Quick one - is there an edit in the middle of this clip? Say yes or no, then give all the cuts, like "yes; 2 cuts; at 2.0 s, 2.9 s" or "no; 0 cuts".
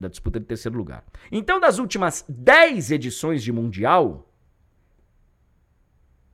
yes; 1 cut; at 1.2 s